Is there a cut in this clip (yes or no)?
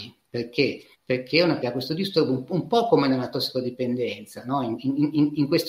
yes